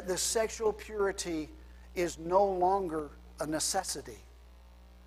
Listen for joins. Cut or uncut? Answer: uncut